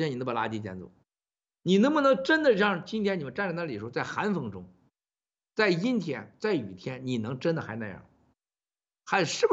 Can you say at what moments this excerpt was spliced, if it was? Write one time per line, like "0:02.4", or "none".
none